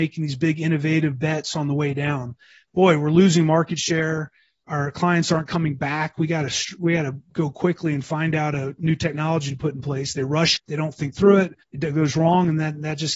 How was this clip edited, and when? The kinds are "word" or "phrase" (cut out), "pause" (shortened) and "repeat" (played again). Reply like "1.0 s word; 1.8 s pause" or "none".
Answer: 10.6 s word; 11.6 s pause